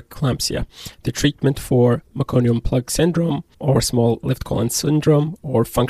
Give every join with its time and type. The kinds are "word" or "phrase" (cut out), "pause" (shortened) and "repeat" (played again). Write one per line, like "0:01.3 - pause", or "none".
0:02.1 - pause
0:03.5 - pause